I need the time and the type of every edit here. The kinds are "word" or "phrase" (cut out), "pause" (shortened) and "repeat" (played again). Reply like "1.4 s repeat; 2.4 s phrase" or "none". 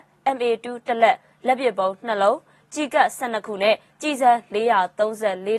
none